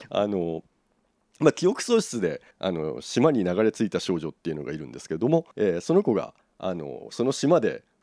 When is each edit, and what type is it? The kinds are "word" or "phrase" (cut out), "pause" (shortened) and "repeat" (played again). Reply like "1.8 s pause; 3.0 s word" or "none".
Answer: 2.5 s pause; 5.5 s pause